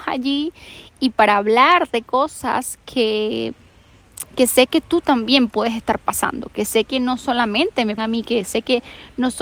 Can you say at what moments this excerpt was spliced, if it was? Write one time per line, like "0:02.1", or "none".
0:08.0

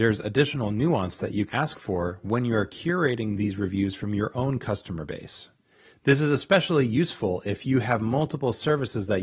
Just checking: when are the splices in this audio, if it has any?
0:01.5

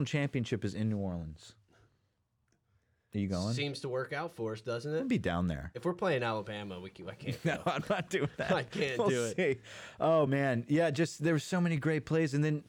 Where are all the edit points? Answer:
none

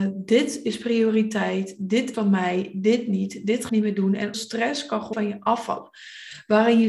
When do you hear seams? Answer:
0:02.1
0:03.7
0:04.3
0:05.1

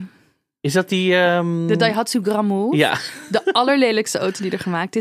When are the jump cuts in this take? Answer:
none

